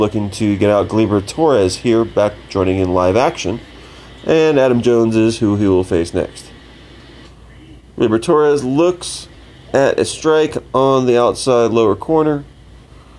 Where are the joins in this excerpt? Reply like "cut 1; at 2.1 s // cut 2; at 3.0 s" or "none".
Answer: none